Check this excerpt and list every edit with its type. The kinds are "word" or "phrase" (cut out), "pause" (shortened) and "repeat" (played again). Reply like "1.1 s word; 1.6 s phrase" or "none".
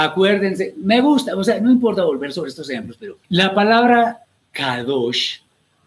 3.2 s pause; 4.4 s pause